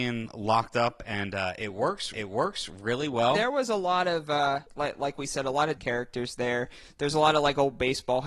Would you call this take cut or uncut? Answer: cut